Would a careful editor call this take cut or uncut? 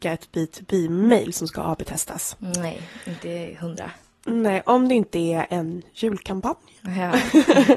uncut